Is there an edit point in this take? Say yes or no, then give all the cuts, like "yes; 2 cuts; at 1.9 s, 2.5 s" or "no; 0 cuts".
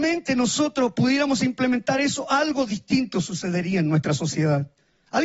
no; 0 cuts